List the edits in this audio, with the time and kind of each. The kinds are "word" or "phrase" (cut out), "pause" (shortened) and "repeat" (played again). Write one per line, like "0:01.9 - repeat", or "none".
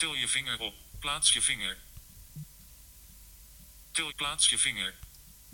0:04.1 - phrase